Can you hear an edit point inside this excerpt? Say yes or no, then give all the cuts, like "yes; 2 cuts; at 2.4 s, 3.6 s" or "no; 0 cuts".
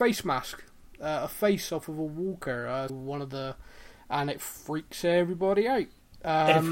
yes; 1 cut; at 2.9 s